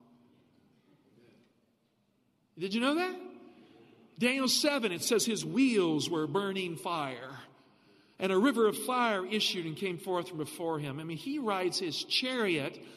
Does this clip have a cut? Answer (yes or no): no